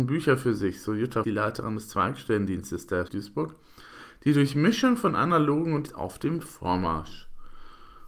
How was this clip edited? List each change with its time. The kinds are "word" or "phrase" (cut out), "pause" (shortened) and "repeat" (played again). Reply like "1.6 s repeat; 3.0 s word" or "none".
1.2 s phrase; 3.1 s word; 5.9 s phrase